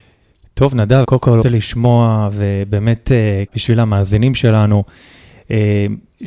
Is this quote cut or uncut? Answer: cut